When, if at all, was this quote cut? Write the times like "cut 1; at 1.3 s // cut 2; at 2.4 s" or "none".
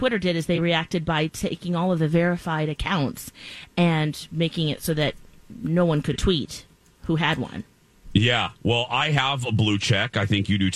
none